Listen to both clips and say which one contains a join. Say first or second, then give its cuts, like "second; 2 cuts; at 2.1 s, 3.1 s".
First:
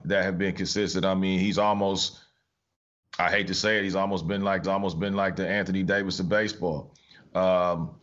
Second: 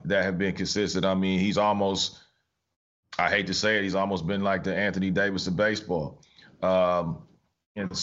first; 1 cut; at 4.6 s